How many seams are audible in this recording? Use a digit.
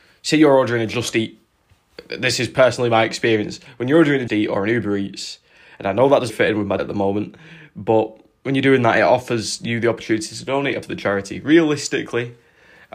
4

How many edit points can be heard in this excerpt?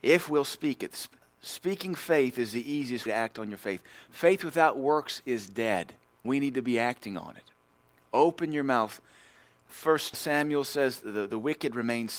2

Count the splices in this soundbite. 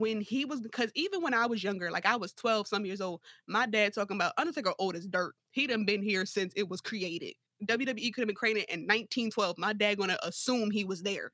2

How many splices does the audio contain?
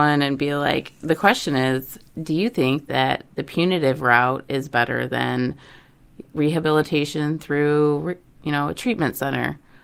0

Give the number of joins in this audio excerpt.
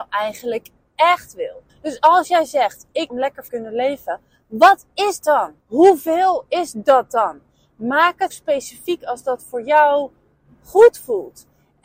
6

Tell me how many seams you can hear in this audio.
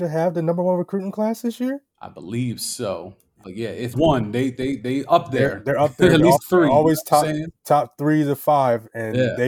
4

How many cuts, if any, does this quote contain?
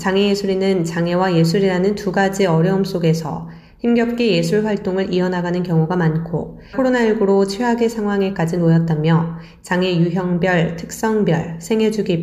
1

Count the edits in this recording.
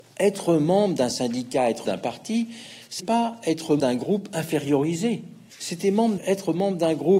5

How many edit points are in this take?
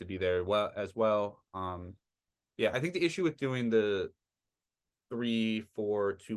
0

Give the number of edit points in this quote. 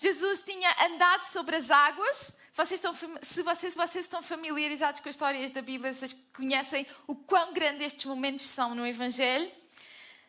1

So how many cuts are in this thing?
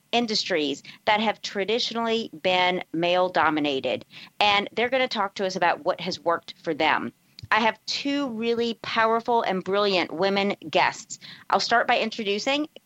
0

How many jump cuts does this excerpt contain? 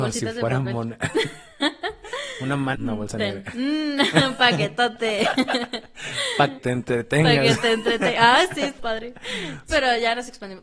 4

